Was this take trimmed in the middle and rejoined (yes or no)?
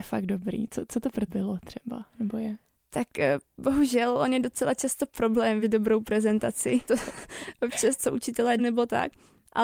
yes